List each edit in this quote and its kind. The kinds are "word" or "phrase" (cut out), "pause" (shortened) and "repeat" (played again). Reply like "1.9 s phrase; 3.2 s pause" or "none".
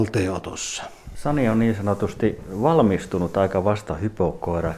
1.0 s pause